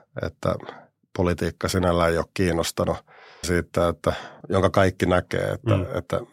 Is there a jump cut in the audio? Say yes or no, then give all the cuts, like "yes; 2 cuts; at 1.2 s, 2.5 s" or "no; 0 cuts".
yes; 2 cuts; at 3.4 s, 4.4 s